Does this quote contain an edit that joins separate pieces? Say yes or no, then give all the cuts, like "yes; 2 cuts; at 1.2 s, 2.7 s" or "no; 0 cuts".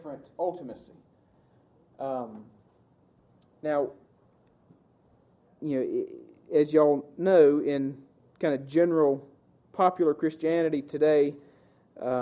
no; 0 cuts